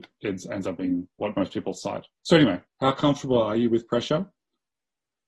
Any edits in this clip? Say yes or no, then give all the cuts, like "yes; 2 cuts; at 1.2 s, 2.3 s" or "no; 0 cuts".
yes; 3 cuts; at 1.1 s, 2.2 s, 2.6 s